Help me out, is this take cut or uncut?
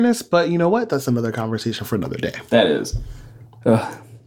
uncut